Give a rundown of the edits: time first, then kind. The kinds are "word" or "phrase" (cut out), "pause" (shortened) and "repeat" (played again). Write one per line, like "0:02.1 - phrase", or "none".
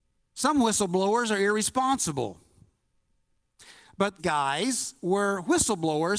0:04.2 - word